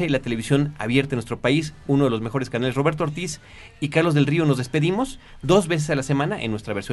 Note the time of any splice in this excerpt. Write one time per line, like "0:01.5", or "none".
none